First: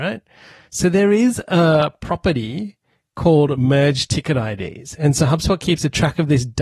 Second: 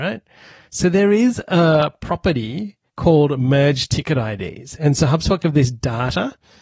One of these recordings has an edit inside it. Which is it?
second; 2 cuts; at 2.9 s, 5.4 s

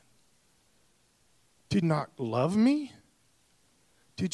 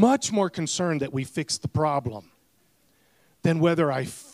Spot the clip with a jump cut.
first; 1 cut; at 1.8 s

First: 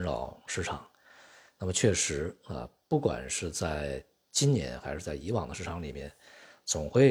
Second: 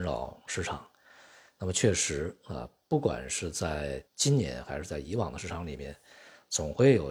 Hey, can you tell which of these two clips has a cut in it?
second; 1 cut; at 4.1 s

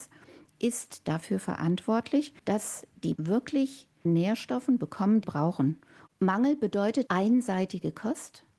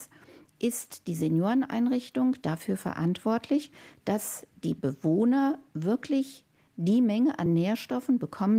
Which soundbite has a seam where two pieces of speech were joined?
first; 6 cuts; at 1.0 s, 2.4 s, 3.2 s, 4.1 s, 5.2 s, 7.1 s

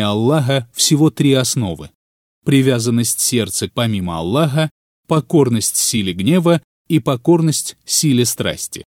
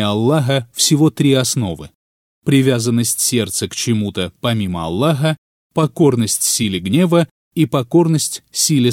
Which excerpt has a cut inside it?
first; 1 cut; at 3.7 s

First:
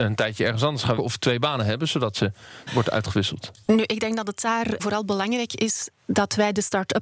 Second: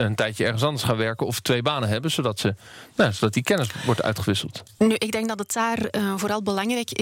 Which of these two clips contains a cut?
first; 3 cuts; at 1.0 s, 2.7 s, 4.8 s

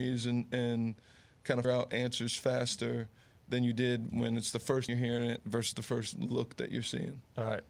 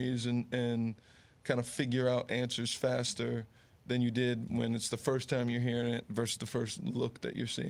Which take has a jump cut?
first; 2 cuts; at 1.6 s, 4.9 s

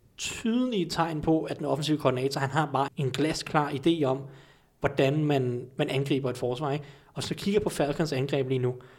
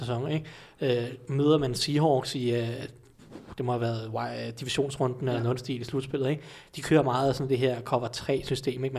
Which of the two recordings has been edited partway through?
first; 1 cut; at 2.9 s

